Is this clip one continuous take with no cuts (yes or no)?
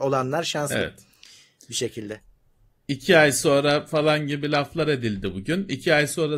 yes